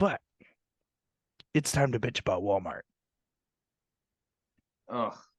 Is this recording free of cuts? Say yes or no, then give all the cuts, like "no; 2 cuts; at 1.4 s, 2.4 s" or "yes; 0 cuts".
yes; 0 cuts